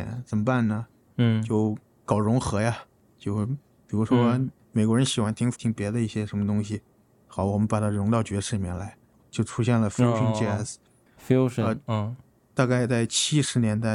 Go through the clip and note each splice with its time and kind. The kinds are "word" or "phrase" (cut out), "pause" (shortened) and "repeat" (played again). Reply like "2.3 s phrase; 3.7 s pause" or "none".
5.5 s phrase